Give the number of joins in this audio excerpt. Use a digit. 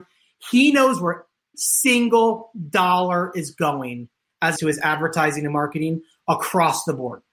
2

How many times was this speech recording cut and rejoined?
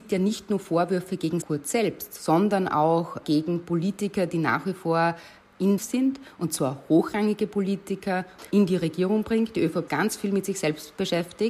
5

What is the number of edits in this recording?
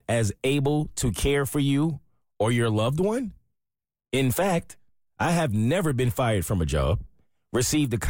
0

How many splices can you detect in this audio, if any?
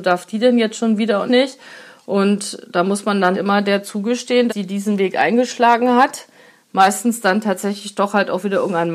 3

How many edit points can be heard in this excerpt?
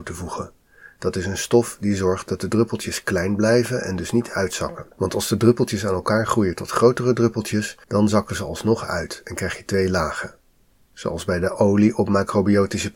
2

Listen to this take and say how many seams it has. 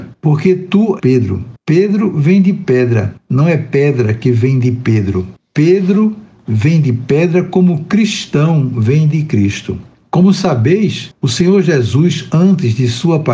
1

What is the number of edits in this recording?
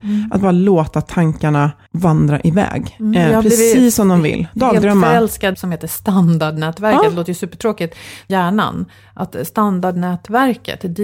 3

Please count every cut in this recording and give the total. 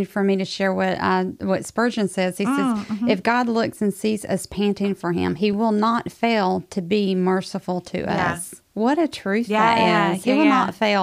0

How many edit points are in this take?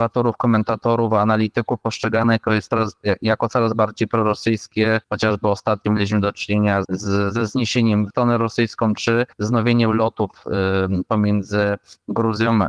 4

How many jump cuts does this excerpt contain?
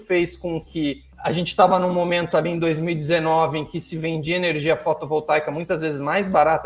0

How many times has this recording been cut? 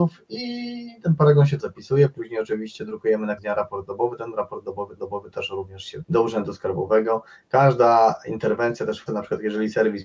5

